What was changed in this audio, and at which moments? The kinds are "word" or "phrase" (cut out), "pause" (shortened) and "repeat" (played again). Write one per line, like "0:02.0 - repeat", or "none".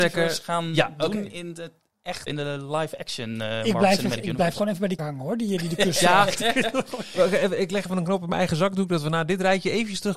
0:02.3 - word
0:05.0 - word